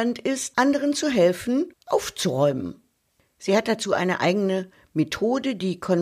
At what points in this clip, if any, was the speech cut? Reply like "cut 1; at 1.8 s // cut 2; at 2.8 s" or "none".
none